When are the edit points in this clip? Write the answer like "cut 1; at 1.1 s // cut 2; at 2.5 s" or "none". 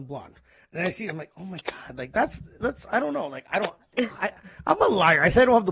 none